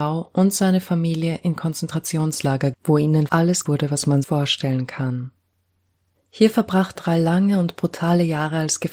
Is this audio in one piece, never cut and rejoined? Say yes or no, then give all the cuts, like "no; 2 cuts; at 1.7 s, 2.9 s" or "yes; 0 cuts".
no; 5 cuts; at 2.7 s, 3.3 s, 3.7 s, 4.2 s, 7.0 s